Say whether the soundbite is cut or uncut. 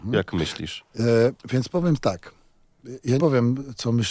cut